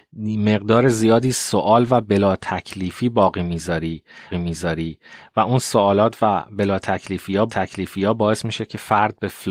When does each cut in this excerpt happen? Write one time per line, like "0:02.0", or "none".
0:04.3
0:07.5